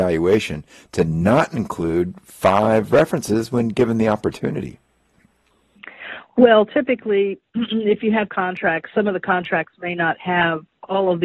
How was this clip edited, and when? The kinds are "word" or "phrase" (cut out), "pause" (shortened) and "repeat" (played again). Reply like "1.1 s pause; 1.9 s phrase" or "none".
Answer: 8.3 s phrase